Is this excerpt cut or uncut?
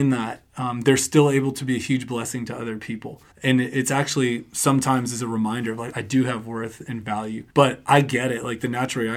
cut